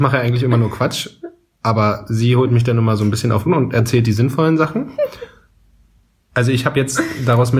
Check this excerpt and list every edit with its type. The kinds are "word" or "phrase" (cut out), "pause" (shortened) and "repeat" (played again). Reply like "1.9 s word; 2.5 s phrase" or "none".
3.5 s word